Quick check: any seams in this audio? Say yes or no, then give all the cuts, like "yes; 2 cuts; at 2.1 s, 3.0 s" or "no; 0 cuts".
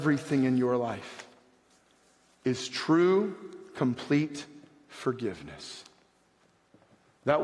no; 0 cuts